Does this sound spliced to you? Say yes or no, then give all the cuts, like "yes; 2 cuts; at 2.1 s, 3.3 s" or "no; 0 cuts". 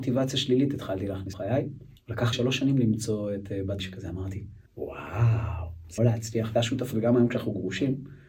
yes; 8 cuts; at 1.3 s, 2.0 s, 2.3 s, 3.8 s, 4.7 s, 6.0 s, 6.5 s, 6.9 s